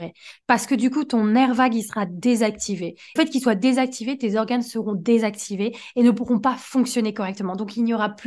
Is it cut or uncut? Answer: cut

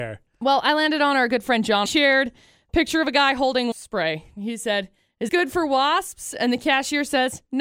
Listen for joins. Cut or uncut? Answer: cut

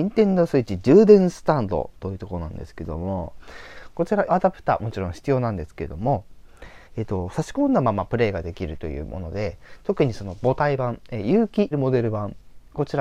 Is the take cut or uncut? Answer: cut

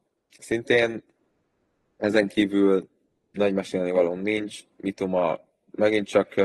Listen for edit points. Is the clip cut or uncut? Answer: uncut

